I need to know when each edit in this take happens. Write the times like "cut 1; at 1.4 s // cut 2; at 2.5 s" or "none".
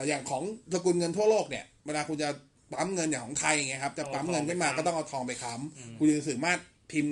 none

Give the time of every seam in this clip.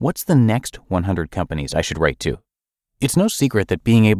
none

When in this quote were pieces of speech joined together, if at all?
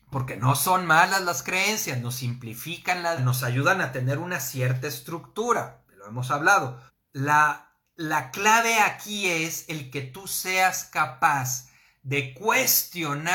cut 1; at 3.2 s // cut 2; at 6.9 s

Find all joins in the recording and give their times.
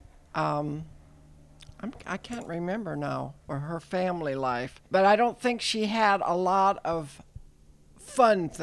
cut 1; at 4.9 s

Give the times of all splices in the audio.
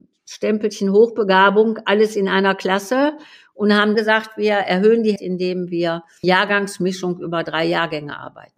cut 1; at 3.9 s // cut 2; at 5.2 s // cut 3; at 6.2 s

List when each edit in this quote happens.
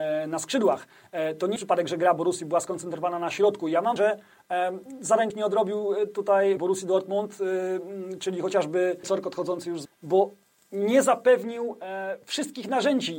cut 1; at 1.6 s // cut 2; at 4.0 s // cut 3; at 5.3 s // cut 4; at 6.6 s // cut 5; at 9.0 s // cut 6; at 9.9 s

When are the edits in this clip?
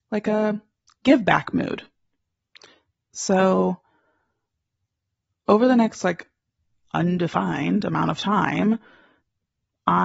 none

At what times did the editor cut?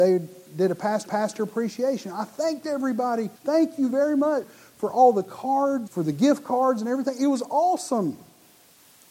cut 1; at 1.1 s // cut 2; at 3.4 s // cut 3; at 4.4 s // cut 4; at 5.9 s

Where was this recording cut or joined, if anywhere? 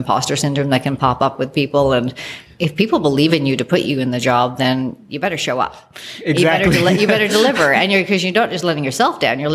none

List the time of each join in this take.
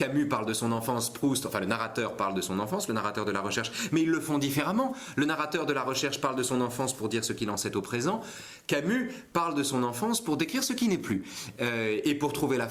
none

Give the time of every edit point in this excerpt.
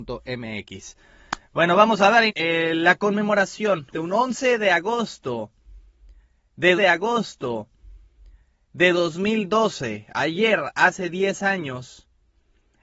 cut 1; at 2.3 s // cut 2; at 3.9 s // cut 3; at 6.8 s

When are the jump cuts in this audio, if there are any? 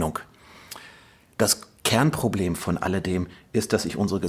none

